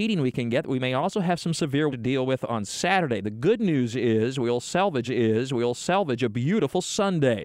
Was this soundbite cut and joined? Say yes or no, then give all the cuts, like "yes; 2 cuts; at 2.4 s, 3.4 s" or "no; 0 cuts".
yes; 2 cuts; at 1.9 s, 5.0 s